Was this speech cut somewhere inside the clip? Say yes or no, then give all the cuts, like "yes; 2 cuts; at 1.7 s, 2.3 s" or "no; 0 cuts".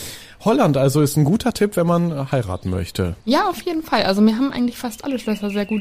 yes; 1 cut; at 3.2 s